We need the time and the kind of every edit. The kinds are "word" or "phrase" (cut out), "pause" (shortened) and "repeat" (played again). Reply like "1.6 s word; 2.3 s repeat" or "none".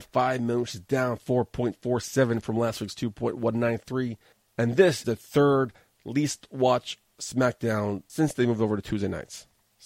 5.0 s word

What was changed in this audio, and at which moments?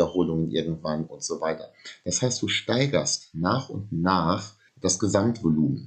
4.7 s pause

